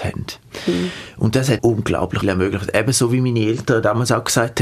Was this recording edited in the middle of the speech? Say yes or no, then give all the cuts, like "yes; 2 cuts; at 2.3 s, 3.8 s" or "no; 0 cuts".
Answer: yes; 2 cuts; at 1.6 s, 2.2 s